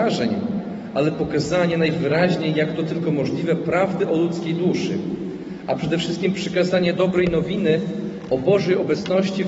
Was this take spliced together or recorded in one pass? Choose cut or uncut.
uncut